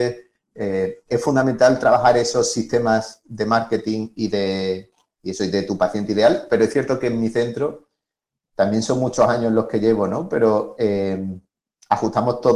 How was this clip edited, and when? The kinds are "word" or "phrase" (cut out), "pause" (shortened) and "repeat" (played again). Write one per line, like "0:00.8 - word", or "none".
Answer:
none